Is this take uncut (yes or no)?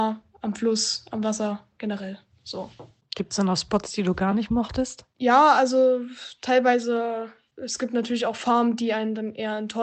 yes